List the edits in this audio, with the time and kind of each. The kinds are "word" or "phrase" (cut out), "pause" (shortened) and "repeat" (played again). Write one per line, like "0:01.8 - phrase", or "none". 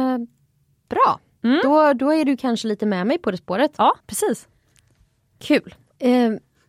0:04.0 - pause